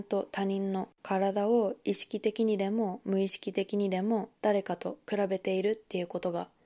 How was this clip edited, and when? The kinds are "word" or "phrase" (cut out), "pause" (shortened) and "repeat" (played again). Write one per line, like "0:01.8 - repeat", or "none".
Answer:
0:04.4 - pause